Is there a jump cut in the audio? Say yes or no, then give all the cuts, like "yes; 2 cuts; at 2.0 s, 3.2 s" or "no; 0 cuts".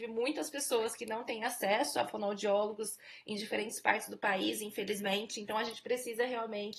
no; 0 cuts